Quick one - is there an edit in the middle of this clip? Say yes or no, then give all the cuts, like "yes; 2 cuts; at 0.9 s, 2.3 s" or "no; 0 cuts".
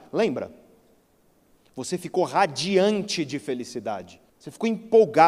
yes; 1 cut; at 4.3 s